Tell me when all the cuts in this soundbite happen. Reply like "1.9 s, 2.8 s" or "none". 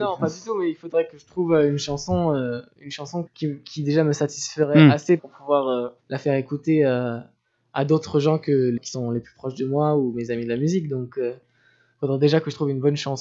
3.3 s, 5.2 s, 6.0 s, 8.8 s